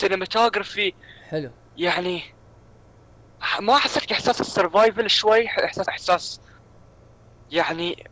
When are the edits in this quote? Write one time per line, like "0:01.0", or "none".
0:05.9